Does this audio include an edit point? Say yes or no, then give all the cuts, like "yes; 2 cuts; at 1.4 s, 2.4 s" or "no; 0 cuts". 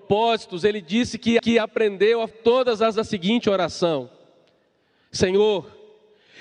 yes; 3 cuts; at 1.4 s, 2.3 s, 2.9 s